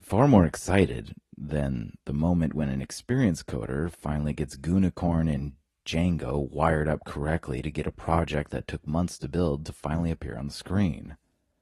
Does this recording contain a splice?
no; 0 cuts

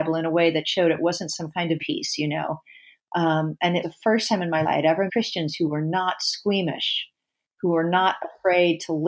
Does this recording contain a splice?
yes; 4 cuts; at 1.8 s, 3.8 s, 4.6 s, 5.1 s

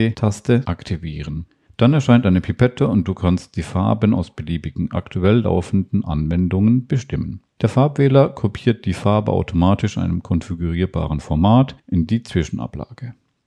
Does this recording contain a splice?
no; 0 cuts

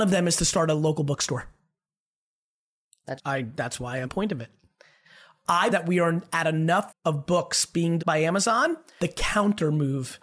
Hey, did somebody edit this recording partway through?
yes; 6 cuts; at 3.2 s, 4.0 s, 5.7 s, 6.9 s, 8.0 s, 9.0 s

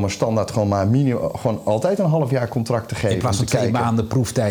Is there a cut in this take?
no; 0 cuts

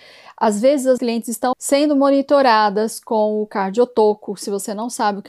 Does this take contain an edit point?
yes; 2 cuts; at 1.0 s, 1.5 s

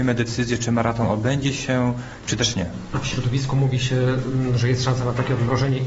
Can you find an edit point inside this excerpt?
no; 0 cuts

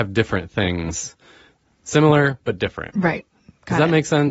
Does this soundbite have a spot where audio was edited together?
no; 0 cuts

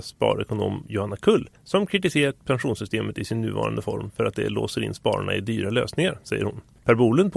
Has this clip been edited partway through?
no; 0 cuts

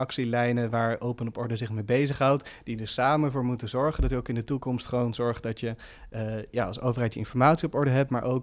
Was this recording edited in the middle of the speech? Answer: no; 0 cuts

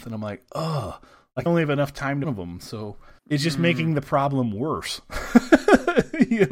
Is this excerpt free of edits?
no; 3 cuts; at 1.5 s, 2.2 s, 3.2 s

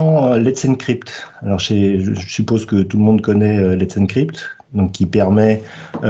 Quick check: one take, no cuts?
yes; 0 cuts

